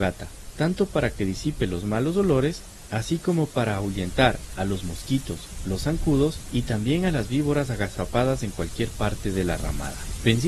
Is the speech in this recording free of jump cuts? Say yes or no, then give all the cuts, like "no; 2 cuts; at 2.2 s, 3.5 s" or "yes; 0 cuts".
yes; 0 cuts